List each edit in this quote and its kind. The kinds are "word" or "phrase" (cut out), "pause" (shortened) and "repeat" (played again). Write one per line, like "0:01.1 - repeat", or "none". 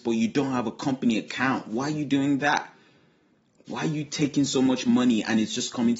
none